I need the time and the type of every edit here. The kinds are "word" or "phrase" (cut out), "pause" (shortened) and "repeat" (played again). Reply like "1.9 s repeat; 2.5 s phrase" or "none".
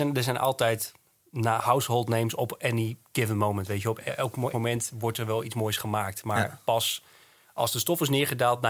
4.5 s word